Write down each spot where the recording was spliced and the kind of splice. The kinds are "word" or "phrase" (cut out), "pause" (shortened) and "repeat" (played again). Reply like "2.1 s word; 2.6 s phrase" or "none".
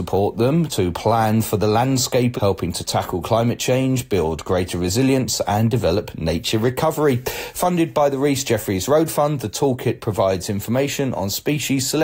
2.4 s phrase